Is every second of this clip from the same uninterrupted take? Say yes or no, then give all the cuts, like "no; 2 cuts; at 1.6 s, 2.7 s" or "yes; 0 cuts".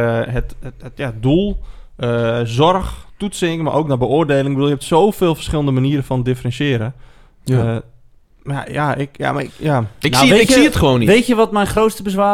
yes; 0 cuts